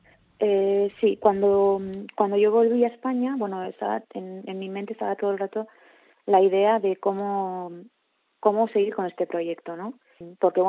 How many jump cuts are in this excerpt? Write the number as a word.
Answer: zero